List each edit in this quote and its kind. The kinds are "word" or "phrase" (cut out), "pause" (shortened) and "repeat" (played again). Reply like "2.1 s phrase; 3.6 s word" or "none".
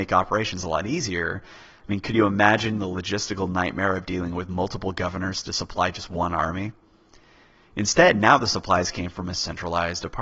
none